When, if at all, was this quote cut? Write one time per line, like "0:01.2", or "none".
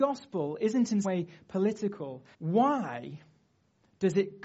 0:01.0
0:02.3

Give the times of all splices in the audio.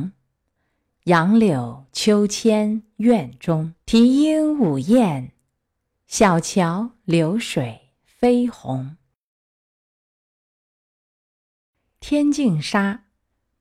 0:03.8

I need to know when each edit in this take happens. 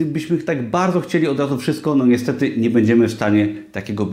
none

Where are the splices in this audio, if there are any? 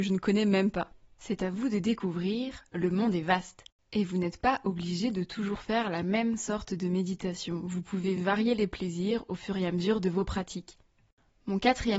none

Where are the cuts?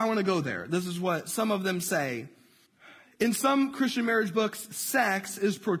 0:02.7

